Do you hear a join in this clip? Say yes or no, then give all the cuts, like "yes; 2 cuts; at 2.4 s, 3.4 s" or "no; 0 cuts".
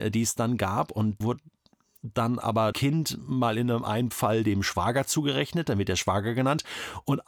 yes; 2 cuts; at 1.2 s, 2.7 s